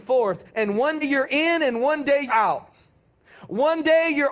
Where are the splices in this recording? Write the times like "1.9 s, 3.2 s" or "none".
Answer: 1.0 s, 2.3 s